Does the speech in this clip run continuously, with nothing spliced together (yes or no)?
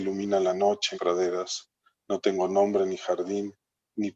no